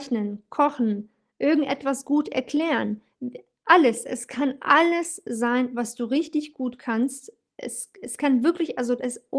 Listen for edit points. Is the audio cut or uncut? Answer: uncut